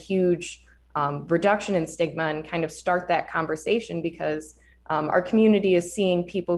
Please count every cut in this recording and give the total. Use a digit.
0